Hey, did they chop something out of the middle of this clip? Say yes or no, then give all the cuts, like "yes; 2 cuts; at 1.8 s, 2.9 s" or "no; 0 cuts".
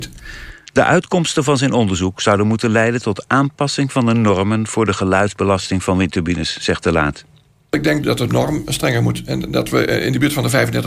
no; 0 cuts